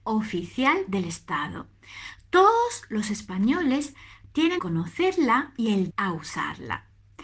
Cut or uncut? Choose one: cut